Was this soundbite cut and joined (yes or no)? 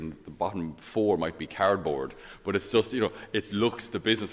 no